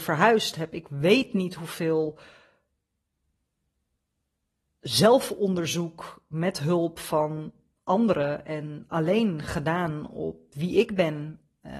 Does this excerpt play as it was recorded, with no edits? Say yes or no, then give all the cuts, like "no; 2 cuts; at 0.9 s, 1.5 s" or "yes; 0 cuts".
yes; 0 cuts